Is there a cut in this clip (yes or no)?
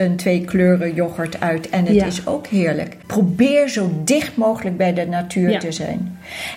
no